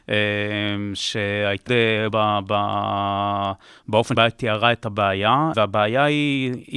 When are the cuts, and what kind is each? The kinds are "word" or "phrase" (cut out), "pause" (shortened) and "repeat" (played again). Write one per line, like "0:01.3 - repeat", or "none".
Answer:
0:01.7 - word
0:02.1 - word
0:04.2 - word
0:05.5 - word

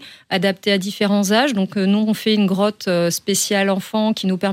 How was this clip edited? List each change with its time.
none

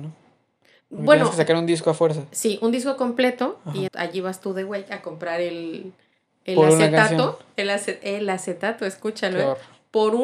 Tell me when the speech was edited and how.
0:03.9 - word

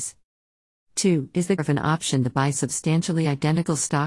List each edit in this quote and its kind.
0:01.6 - word

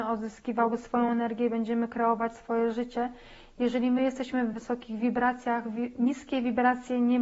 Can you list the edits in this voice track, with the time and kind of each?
none

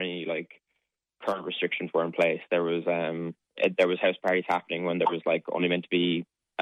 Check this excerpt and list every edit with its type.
0:03.4 - pause

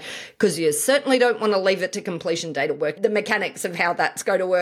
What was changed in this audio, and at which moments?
0:03.0 - word

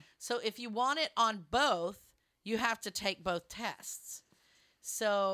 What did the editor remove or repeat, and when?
none

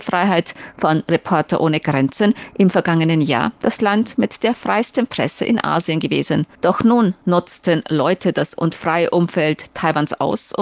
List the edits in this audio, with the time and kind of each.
0:08.6 - word

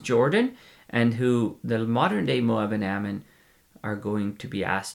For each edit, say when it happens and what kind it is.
none

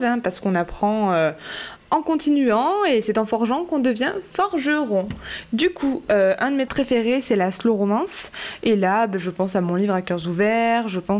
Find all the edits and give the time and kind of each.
0:06.7 - word

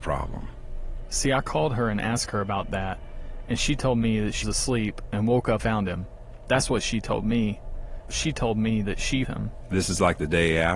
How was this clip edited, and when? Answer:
0:04.4 - word
0:05.6 - word
0:09.2 - word

